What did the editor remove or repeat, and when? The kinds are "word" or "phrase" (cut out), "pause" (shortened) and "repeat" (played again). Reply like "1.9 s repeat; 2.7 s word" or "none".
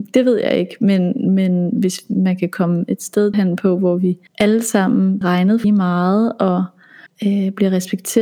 3.3 s word; 4.3 s pause; 5.2 s word; 5.6 s word; 7.1 s pause